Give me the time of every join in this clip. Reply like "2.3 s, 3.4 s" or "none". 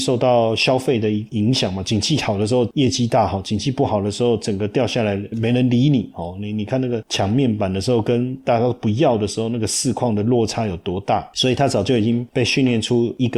5.3 s